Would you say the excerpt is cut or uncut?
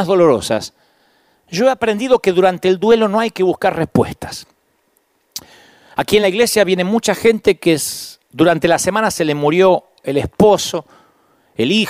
uncut